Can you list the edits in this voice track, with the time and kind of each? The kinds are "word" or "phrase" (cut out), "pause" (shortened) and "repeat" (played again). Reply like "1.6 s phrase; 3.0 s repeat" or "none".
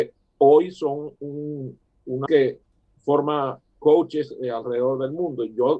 2.3 s word

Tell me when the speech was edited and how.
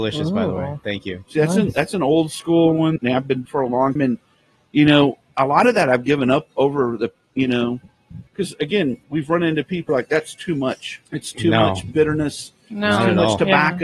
3.0 s word; 3.5 s word; 4.0 s word; 8.3 s pause; 9.0 s pause; 9.9 s word; 11.1 s pause

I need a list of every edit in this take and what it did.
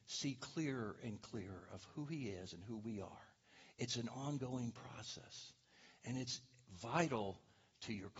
none

